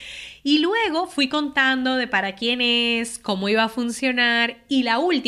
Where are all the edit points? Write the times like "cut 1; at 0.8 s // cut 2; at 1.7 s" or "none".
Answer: none